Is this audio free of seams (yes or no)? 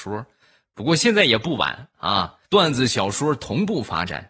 no